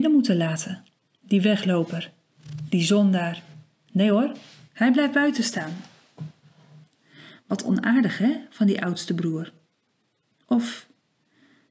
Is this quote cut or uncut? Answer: uncut